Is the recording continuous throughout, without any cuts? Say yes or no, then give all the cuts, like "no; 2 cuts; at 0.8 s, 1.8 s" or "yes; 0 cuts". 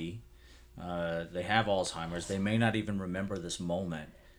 yes; 0 cuts